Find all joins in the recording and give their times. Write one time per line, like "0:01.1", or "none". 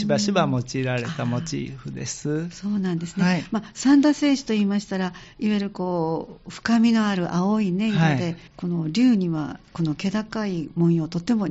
0:08.5